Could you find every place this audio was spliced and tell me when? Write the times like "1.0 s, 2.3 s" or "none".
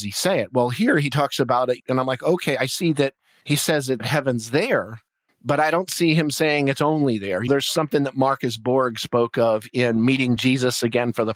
none